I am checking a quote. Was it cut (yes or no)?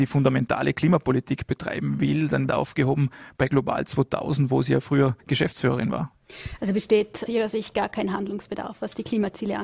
yes